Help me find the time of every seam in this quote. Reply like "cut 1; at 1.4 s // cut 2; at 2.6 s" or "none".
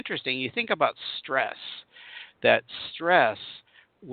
none